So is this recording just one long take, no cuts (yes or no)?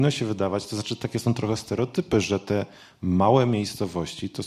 yes